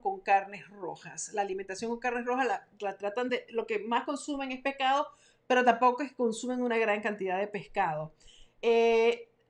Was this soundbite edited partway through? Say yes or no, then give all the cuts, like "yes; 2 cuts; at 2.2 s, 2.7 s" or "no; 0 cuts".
no; 0 cuts